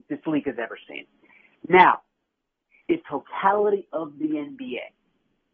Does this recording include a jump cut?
yes; 1 cut; at 3.0 s

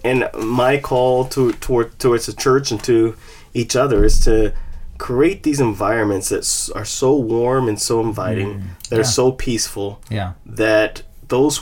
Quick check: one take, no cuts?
yes; 0 cuts

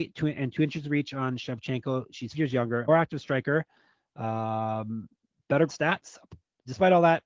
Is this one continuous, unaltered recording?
no; 3 cuts; at 2.3 s, 2.9 s, 5.7 s

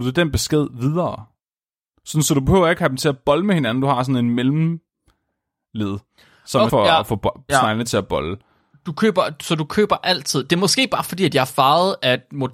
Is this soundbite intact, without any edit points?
no; 1 cut; at 6.7 s

